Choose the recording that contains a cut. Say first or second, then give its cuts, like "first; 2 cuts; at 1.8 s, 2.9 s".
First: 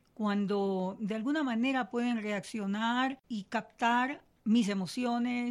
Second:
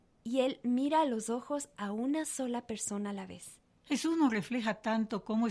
first; 1 cut; at 3.2 s